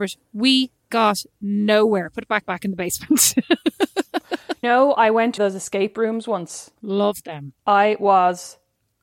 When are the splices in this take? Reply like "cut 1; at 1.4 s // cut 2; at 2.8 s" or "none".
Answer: cut 1; at 2.4 s // cut 2; at 4.6 s // cut 3; at 5.4 s // cut 4; at 6.7 s